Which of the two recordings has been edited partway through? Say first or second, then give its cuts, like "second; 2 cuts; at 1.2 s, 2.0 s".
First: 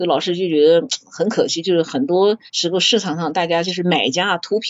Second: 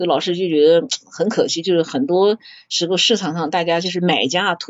first; 1 cut; at 2.5 s